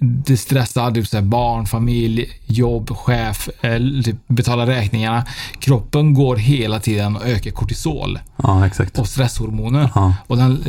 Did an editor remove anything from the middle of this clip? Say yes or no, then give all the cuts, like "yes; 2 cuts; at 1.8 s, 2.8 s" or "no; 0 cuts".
no; 0 cuts